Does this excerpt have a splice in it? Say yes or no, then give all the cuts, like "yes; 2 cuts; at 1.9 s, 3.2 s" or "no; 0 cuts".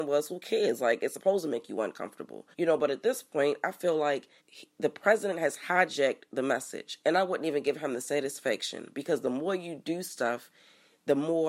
yes; 2 cuts; at 2.5 s, 4.4 s